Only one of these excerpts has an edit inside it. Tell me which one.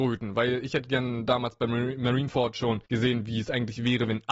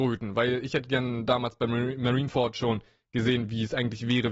first; 1 cut; at 2.9 s

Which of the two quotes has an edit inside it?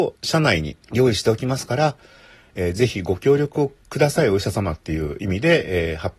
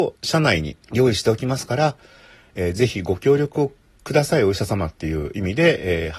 first; 1 cut; at 3.8 s

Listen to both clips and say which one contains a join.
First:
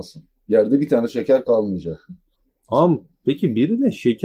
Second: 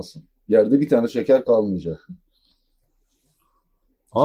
first; 1 cut; at 2.3 s

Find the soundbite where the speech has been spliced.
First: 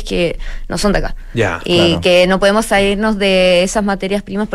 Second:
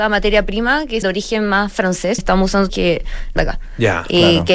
second; 4 cuts; at 1.0 s, 2.2 s, 2.7 s, 3.4 s

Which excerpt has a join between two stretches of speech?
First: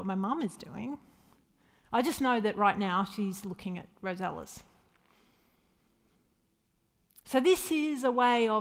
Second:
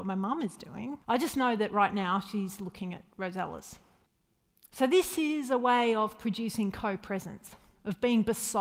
second; 2 cuts; at 1.0 s, 4.1 s

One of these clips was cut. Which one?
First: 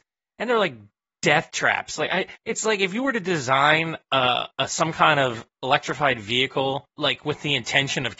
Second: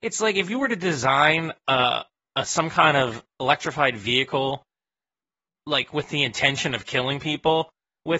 first; 3 cuts; at 2.4 s, 4.5 s, 6.9 s

